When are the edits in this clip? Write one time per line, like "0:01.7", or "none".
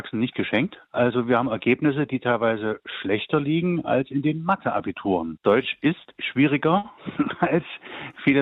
0:07.0